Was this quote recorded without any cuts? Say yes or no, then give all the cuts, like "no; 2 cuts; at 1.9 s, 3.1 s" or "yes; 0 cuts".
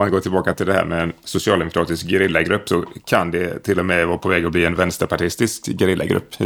yes; 0 cuts